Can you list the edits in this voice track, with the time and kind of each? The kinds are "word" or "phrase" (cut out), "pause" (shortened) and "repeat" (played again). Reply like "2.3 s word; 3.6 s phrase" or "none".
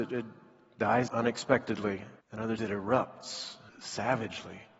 1.1 s word; 2.2 s pause; 2.6 s word; 3.7 s word